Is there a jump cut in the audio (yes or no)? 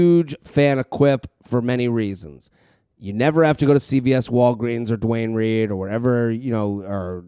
no